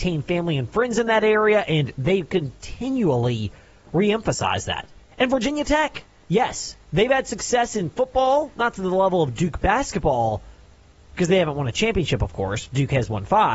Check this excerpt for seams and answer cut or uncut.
uncut